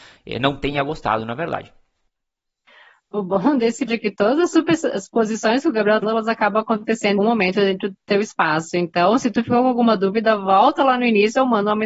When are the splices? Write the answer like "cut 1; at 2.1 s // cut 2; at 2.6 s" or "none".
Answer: cut 1; at 3.9 s // cut 2; at 6.0 s // cut 3; at 7.2 s

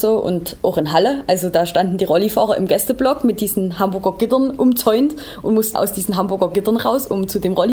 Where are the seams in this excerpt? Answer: cut 1; at 5.7 s

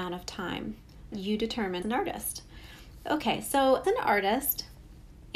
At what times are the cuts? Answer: cut 1; at 1.1 s // cut 2; at 1.8 s // cut 3; at 3.8 s

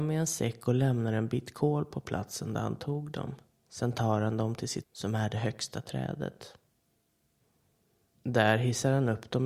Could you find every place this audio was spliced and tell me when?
cut 1; at 4.8 s

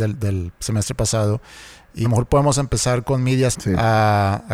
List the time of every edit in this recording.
cut 1; at 2.0 s // cut 2; at 3.5 s

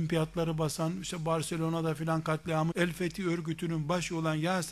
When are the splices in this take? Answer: cut 1; at 2.7 s

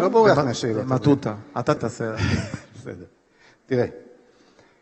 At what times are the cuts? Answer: cut 1; at 1.8 s

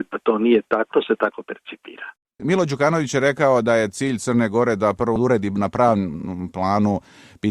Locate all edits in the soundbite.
cut 1; at 0.9 s

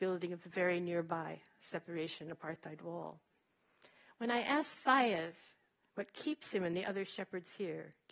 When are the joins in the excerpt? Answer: none

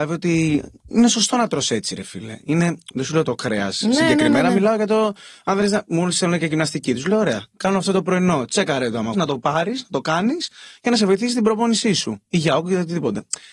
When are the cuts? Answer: cut 1; at 9.1 s

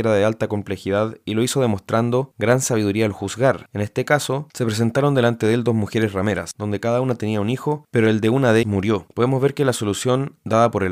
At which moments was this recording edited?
cut 1; at 8.6 s

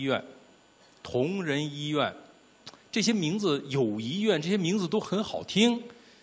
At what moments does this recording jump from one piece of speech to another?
none

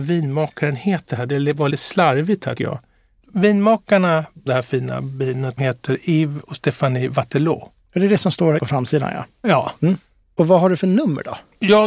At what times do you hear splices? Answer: cut 1; at 1.7 s // cut 2; at 2.6 s // cut 3; at 4.5 s // cut 4; at 5.6 s // cut 5; at 8.6 s

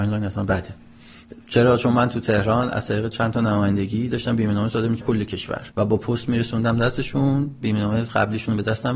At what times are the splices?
cut 1; at 5.0 s // cut 2; at 5.7 s

